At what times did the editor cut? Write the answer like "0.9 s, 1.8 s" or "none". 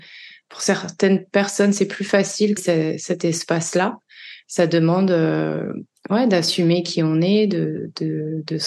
2.6 s